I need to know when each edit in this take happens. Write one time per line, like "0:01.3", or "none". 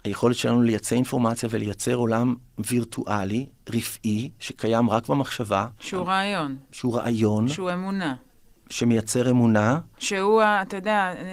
0:05.8